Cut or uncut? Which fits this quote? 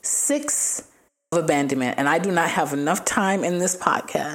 cut